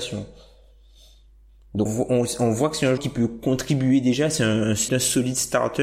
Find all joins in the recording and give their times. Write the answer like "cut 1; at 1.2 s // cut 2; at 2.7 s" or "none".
cut 1; at 1.9 s // cut 2; at 3.0 s // cut 3; at 4.9 s